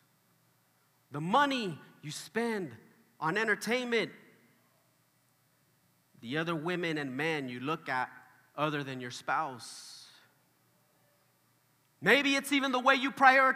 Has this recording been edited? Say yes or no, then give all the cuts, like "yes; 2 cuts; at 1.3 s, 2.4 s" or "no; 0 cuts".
no; 0 cuts